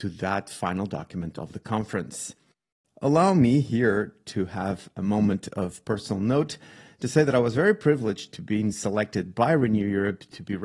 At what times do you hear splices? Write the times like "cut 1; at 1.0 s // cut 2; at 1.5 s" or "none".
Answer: none